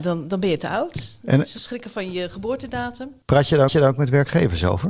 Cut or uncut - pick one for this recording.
cut